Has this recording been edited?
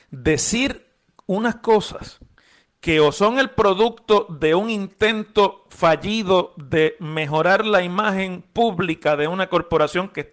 no; 0 cuts

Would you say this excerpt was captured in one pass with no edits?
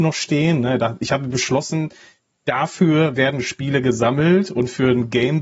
yes; 0 cuts

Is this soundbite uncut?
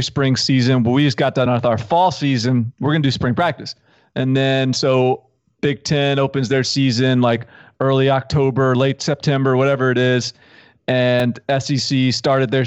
yes; 0 cuts

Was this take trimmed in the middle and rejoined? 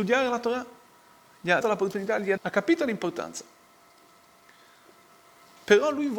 yes; 2 cuts; at 1.6 s, 2.4 s

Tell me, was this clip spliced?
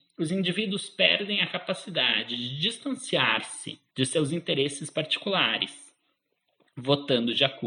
yes; 1 cut; at 3.9 s

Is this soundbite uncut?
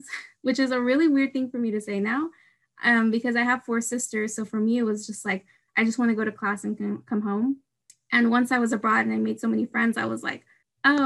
yes; 0 cuts

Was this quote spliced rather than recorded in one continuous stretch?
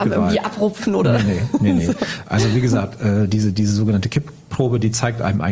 no; 0 cuts

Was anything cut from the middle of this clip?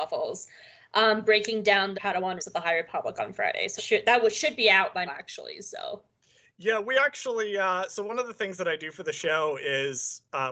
yes; 4 cuts; at 1.9 s, 2.4 s, 3.8 s, 5.1 s

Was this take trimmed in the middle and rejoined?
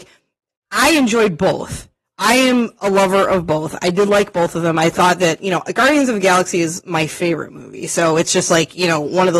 no; 0 cuts

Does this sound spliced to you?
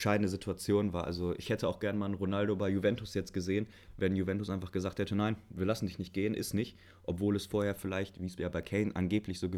no; 0 cuts

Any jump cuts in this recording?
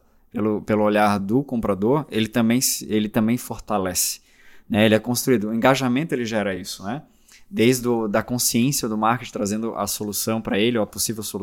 no; 0 cuts

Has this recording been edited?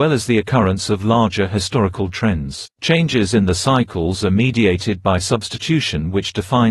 yes; 1 cut; at 2.7 s

